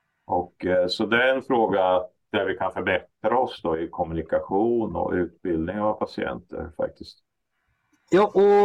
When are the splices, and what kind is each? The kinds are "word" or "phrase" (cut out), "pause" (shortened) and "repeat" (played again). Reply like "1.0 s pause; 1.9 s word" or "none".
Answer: none